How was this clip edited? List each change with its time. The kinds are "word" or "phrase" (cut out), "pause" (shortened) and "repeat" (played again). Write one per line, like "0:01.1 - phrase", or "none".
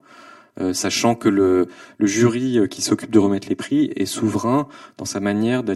none